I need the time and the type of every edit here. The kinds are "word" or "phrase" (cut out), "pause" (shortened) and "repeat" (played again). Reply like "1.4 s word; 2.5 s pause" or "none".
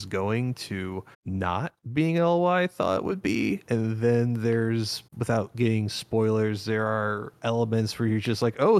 1.1 s pause; 5.1 s pause